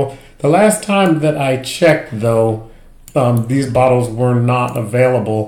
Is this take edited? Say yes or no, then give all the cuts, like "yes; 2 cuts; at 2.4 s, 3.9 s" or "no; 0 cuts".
no; 0 cuts